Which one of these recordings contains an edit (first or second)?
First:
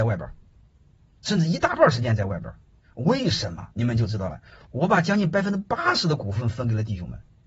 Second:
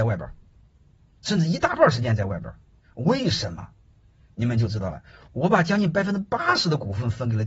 first